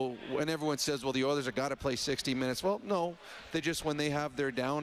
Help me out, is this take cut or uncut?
uncut